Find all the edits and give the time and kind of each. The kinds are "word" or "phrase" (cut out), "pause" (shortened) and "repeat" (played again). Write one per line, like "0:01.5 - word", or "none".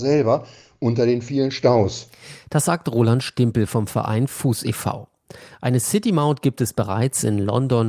none